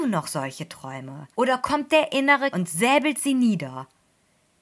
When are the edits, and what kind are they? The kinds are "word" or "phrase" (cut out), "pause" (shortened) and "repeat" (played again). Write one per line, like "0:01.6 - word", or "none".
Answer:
0:01.3 - pause
0:01.9 - word
0:02.5 - word